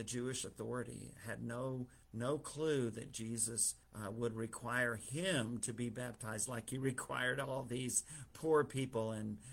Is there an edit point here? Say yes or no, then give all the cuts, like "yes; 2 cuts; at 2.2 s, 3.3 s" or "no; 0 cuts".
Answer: yes; 2 cuts; at 2.0 s, 3.8 s